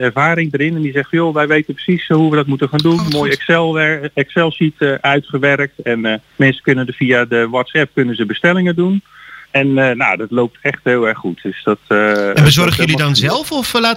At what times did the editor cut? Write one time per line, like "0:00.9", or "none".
0:06.3
0:09.4